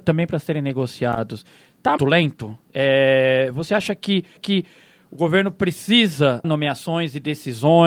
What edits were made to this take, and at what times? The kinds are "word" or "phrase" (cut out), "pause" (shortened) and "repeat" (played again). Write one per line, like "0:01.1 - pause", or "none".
0:02.0 - word
0:04.4 - repeat
0:06.4 - word